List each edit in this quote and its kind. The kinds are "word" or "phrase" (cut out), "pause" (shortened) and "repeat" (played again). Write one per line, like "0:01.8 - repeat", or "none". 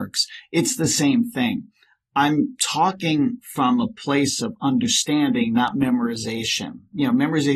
none